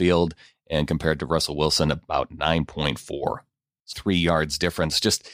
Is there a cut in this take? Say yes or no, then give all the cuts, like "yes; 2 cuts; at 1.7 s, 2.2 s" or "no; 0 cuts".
yes; 1 cut; at 3.9 s